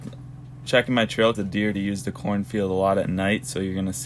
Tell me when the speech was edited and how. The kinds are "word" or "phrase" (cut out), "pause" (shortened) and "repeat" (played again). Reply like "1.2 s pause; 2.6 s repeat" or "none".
1.3 s word; 1.7 s word

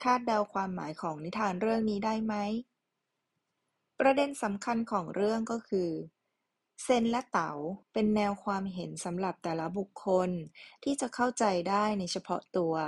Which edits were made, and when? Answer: 7.8 s pause

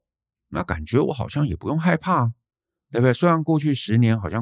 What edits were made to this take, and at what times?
none

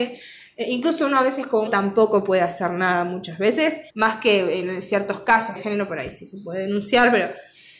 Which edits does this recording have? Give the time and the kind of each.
1.7 s word; 3.9 s pause; 5.6 s phrase

